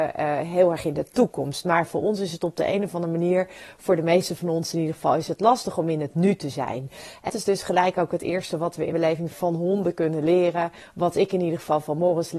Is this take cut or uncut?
cut